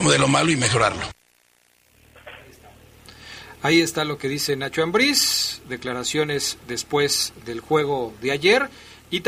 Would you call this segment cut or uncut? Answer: uncut